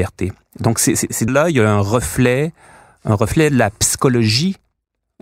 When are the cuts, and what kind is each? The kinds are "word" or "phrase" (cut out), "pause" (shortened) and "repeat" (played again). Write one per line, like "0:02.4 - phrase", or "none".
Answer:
0:01.3 - word